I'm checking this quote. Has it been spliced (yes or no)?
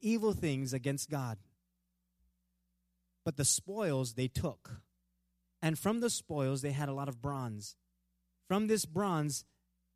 no